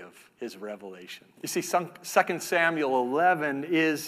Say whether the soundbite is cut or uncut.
cut